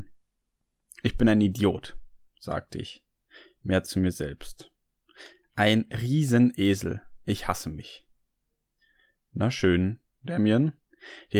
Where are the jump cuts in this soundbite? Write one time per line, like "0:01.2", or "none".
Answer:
none

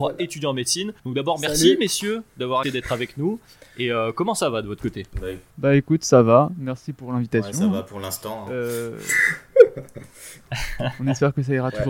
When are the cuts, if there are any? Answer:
0:01.0
0:02.6
0:05.5

